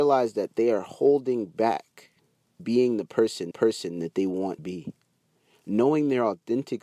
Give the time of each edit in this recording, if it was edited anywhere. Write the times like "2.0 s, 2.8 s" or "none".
2.6 s, 3.5 s, 4.6 s